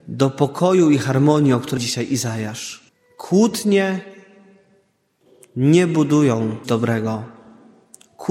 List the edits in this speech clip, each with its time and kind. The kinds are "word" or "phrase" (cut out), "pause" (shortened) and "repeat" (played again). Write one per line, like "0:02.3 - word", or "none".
0:01.8 - word
0:02.9 - pause
0:06.6 - word